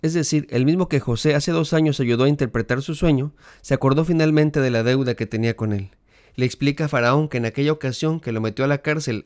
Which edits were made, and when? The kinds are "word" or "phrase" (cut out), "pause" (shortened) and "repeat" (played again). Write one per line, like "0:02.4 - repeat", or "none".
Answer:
none